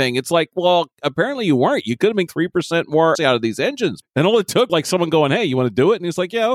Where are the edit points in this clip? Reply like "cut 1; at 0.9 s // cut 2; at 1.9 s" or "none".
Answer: cut 1; at 2.3 s // cut 2; at 3.1 s // cut 3; at 4.0 s // cut 4; at 4.7 s